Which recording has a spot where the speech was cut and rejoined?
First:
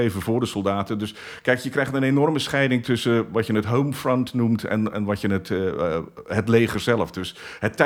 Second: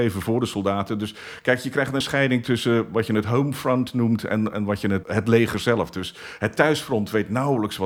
second; 2 cuts; at 2.0 s, 5.0 s

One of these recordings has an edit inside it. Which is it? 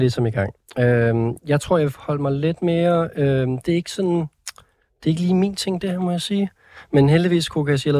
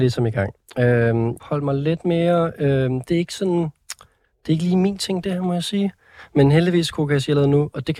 second; 1 cut; at 1.4 s

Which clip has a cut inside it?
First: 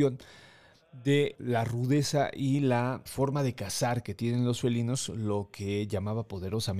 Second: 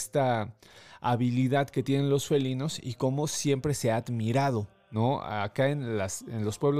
first; 2 cuts; at 1.3 s, 3.1 s

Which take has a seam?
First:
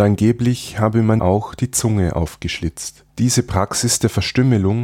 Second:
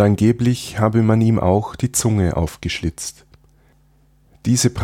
first; 2 cuts; at 1.2 s, 3.1 s

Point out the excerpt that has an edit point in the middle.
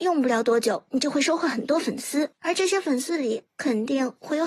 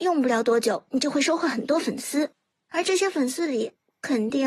first; 2 cuts; at 2.4 s, 3.5 s

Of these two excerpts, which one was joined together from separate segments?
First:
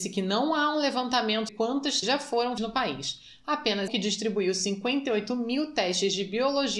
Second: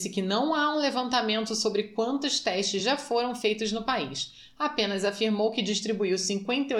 first; 4 cuts; at 1.5 s, 2.0 s, 2.6 s, 3.9 s

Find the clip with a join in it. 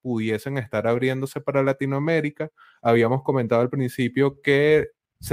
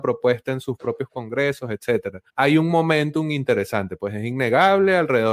second; 1 cut; at 2.3 s

